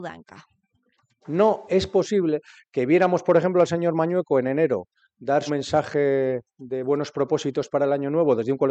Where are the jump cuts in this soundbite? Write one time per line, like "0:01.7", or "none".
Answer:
0:05.5